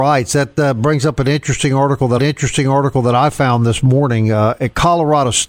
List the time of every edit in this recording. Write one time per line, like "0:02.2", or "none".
0:02.2

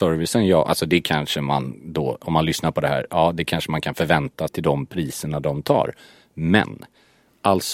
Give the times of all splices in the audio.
0:04.5

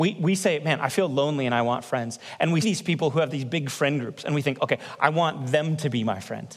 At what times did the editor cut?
0:02.6

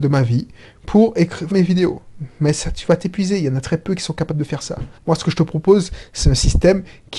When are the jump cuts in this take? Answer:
0:01.5
0:05.0

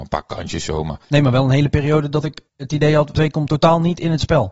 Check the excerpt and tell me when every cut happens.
0:01.0
0:02.5
0:03.1

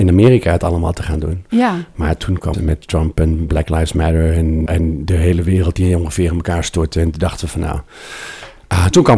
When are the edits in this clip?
0:02.5
0:04.7
0:05.1

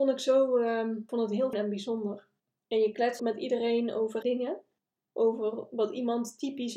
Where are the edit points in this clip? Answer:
0:01.1
0:01.5
0:02.4
0:03.2
0:04.2
0:04.8

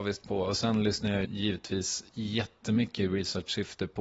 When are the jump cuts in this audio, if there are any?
0:01.2

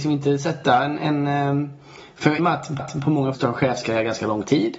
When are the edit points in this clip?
0:02.4
0:02.8
0:03.3

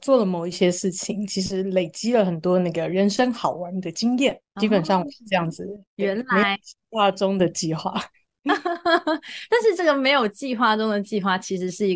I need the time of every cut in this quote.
0:04.4
0:05.9

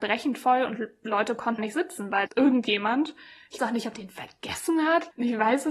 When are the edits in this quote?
0:01.6
0:02.3
0:03.6
0:03.9

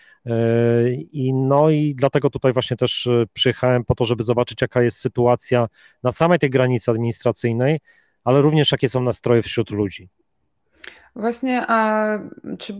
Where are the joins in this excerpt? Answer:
none

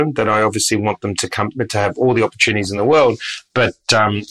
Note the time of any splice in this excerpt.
none

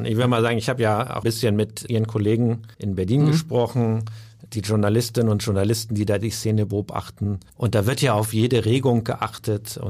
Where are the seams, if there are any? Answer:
0:01.2
0:01.9
0:02.7
0:04.5
0:07.5

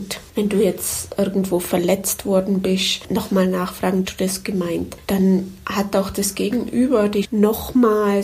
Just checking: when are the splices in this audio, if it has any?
0:04.0
0:07.2

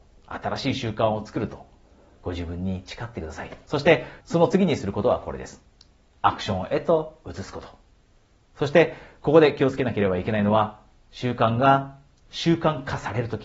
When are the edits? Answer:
none

